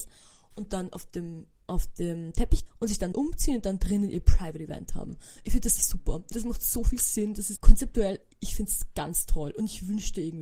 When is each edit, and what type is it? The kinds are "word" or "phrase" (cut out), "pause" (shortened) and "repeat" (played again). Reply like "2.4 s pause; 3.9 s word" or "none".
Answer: 2.7 s word; 3.1 s word; 5.8 s word; 6.3 s word; 7.6 s word